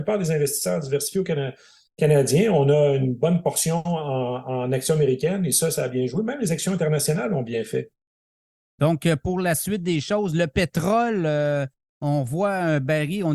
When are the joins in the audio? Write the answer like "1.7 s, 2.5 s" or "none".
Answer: none